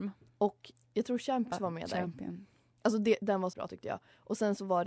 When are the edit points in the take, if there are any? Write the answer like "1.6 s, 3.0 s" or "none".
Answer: 1.5 s, 3.5 s